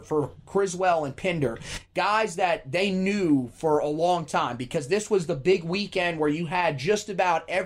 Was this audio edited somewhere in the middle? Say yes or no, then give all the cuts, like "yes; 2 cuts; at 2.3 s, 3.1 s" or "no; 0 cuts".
no; 0 cuts